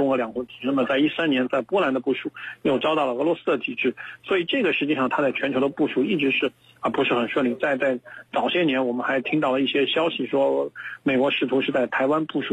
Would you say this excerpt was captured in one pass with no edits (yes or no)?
yes